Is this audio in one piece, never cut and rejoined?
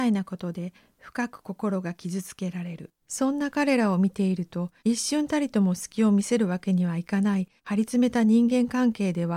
no; 3 cuts; at 3.0 s, 4.8 s, 7.6 s

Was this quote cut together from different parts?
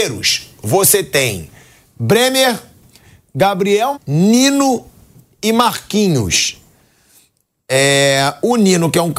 yes; 1 cut; at 3.9 s

